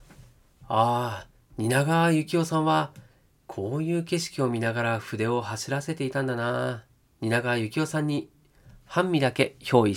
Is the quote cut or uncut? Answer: cut